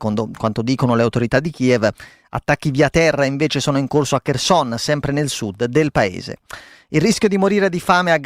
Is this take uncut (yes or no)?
yes